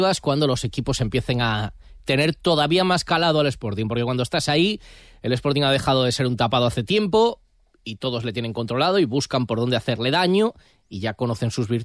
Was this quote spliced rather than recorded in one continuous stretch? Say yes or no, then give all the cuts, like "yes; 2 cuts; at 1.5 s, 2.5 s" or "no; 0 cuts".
no; 0 cuts